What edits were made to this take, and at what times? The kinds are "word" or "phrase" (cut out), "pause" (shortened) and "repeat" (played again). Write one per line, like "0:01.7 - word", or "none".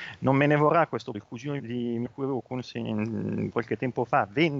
0:01.1 - word
0:01.6 - word
0:02.1 - word
0:03.5 - word